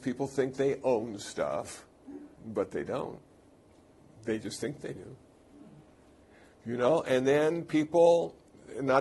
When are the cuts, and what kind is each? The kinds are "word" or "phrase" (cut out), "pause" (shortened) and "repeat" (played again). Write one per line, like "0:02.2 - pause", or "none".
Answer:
0:02.3 - pause